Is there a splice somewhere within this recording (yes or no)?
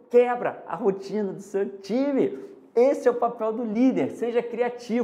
no